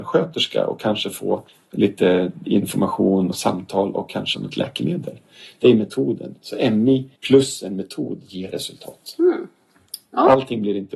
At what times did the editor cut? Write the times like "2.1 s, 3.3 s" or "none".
1.5 s, 3.3 s, 4.3 s, 7.2 s